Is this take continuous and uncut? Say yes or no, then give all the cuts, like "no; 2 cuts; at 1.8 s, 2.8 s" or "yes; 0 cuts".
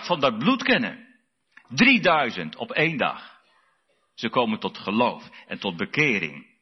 yes; 0 cuts